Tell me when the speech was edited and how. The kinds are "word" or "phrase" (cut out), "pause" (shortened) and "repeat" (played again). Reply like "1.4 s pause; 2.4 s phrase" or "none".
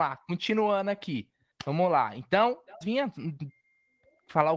1.5 s pause; 2.8 s phrase